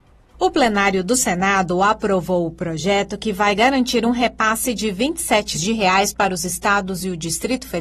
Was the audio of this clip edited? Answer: yes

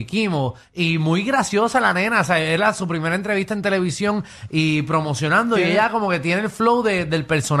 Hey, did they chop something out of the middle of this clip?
no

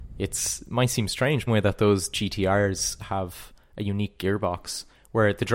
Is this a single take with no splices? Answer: no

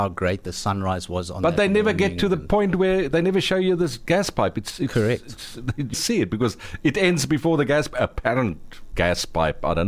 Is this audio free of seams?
no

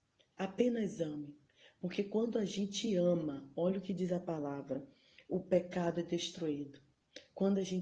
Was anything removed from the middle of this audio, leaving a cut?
no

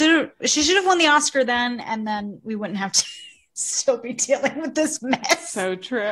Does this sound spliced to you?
no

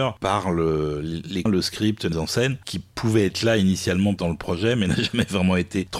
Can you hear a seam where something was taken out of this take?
yes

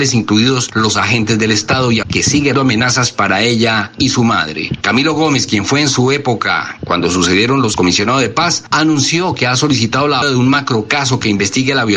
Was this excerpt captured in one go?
no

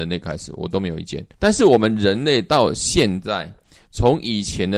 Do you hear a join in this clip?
yes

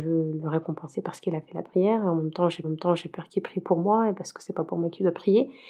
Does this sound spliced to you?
yes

